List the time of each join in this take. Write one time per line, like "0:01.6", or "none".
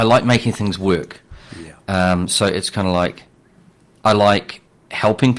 none